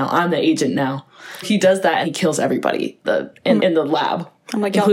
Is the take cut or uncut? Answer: cut